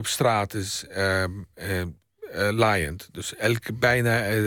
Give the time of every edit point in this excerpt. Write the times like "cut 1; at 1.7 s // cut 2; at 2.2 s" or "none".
none